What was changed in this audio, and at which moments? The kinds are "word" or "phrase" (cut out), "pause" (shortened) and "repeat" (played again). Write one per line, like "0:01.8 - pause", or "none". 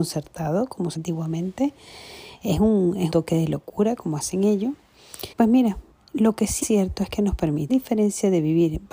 0:01.0 - word
0:03.1 - word
0:05.3 - pause
0:05.9 - pause
0:06.6 - word
0:07.7 - phrase